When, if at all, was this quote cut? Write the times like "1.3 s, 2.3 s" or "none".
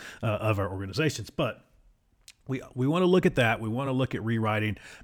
none